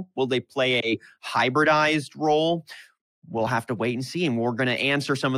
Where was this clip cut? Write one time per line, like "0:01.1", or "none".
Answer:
none